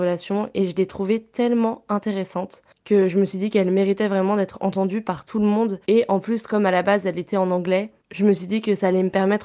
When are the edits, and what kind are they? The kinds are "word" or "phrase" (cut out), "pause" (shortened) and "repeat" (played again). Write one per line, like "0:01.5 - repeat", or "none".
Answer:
0:05.8 - pause